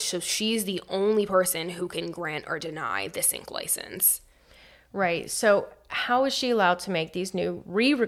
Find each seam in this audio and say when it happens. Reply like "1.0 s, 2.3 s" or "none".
none